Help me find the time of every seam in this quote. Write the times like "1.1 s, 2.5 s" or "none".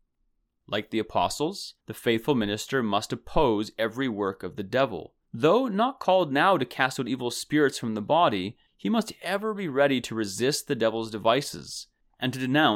1.8 s, 5.2 s, 8.7 s